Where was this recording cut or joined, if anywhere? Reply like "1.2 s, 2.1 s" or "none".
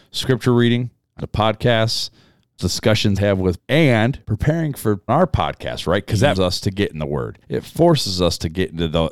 1.2 s, 2.6 s, 3.2 s, 3.6 s, 4.2 s, 5.1 s, 6.4 s, 7.4 s